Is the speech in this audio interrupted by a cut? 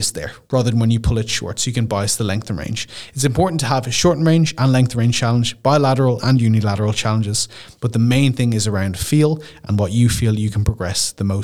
no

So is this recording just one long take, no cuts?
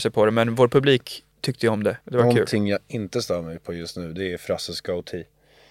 no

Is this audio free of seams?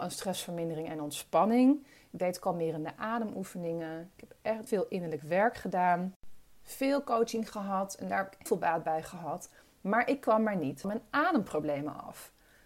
no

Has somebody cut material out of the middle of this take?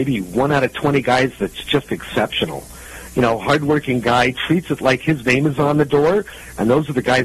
no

